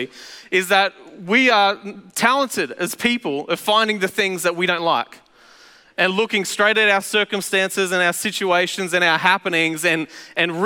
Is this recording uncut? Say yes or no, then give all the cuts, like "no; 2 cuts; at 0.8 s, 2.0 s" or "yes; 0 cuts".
yes; 0 cuts